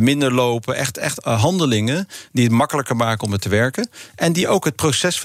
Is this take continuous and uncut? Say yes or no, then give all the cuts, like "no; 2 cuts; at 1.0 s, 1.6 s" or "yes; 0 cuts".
no; 1 cut; at 1.2 s